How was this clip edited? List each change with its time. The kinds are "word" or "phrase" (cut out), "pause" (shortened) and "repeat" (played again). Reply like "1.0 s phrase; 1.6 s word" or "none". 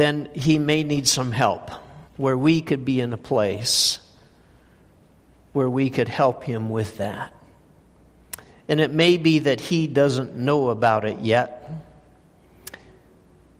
2.1 s pause